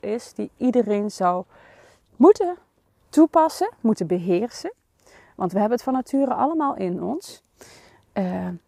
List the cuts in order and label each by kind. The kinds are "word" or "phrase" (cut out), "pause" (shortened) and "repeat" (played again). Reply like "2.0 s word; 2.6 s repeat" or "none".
none